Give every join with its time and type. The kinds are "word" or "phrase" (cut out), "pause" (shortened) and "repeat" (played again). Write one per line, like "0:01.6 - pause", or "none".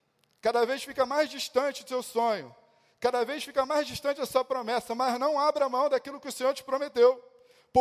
none